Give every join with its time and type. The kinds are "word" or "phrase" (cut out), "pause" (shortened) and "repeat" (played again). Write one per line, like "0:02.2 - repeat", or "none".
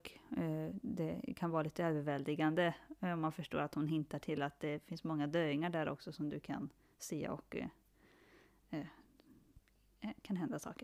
none